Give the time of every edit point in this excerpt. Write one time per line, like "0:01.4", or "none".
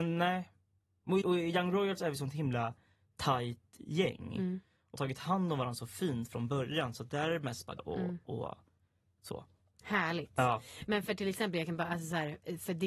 0:01.2
0:05.0
0:07.8